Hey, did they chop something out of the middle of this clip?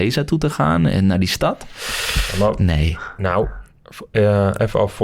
no; 0 cuts

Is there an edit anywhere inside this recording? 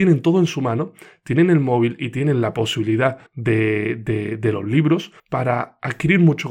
yes; 2 cuts; at 3.3 s, 5.2 s

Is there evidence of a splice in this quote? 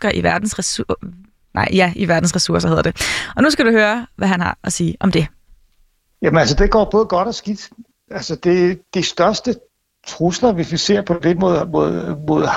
no; 0 cuts

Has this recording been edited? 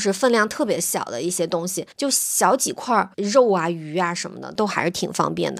yes; 2 cuts; at 1.9 s, 3.1 s

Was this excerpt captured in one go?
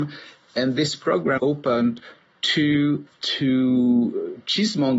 no; 2 cuts; at 1.4 s, 3.1 s

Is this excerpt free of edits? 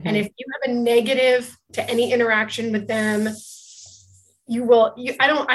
no; 1 cut; at 1.7 s

